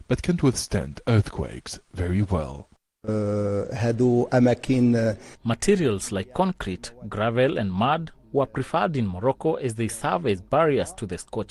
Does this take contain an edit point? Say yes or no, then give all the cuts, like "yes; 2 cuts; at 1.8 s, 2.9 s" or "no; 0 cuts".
no; 0 cuts